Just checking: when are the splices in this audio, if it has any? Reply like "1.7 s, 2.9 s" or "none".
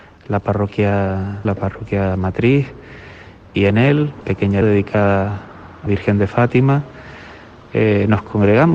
1.4 s, 3.5 s, 4.2 s, 4.6 s, 5.9 s